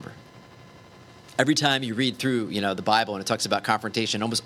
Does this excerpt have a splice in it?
no; 0 cuts

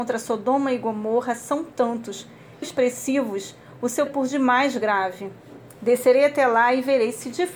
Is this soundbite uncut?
no; 2 cuts; at 2.6 s, 4.1 s

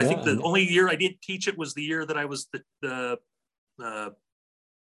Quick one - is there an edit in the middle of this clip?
no; 0 cuts

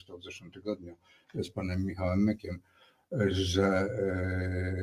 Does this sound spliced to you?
no; 0 cuts

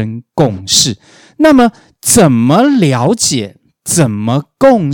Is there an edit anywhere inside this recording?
no; 0 cuts

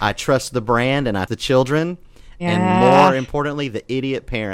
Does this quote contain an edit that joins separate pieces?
yes; 1 cut; at 1.3 s

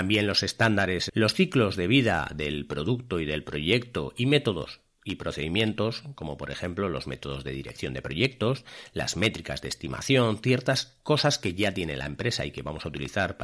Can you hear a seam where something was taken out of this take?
yes; 1 cut; at 1.1 s

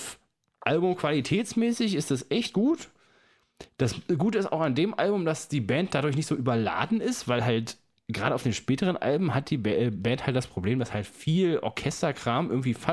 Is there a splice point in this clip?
no; 0 cuts

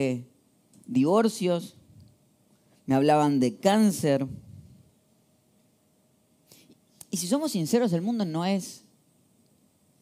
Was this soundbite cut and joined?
no; 0 cuts

